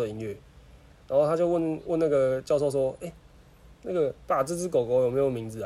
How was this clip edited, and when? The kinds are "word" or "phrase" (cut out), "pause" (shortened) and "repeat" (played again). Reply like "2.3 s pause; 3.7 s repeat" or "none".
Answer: none